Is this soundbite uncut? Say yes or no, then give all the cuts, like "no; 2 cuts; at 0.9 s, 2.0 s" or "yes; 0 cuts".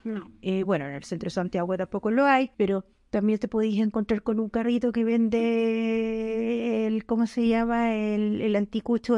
no; 1 cut; at 2.5 s